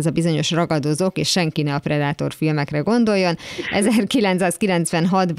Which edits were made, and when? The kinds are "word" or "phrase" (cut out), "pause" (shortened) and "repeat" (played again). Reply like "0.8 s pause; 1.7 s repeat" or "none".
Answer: none

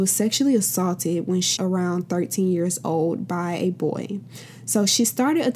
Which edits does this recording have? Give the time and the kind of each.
1.6 s word

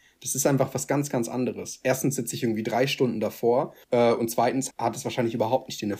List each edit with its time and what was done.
3.8 s pause; 4.7 s word

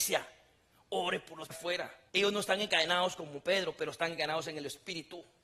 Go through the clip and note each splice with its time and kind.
1.5 s phrase; 2.1 s pause

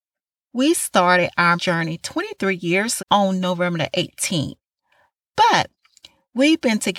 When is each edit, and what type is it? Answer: 1.6 s word; 3.0 s word

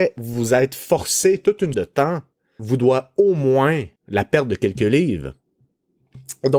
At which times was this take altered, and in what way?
1.7 s word; 2.6 s word; 4.0 s pause

